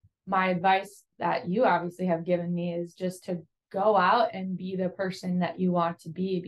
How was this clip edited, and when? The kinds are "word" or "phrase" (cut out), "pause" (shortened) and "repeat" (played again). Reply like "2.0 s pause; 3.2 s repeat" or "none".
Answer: 1.1 s pause; 3.6 s pause